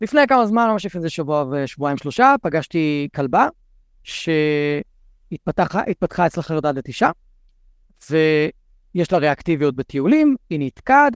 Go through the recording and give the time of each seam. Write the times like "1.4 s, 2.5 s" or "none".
none